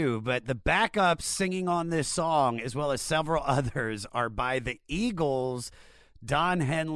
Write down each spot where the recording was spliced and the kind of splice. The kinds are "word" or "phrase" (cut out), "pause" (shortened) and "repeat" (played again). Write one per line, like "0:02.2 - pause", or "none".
none